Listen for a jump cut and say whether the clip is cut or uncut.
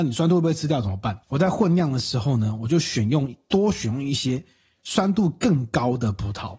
cut